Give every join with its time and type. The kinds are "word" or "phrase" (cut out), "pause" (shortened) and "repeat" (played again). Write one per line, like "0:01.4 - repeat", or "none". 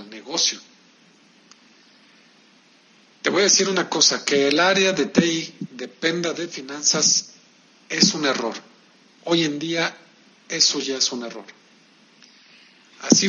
none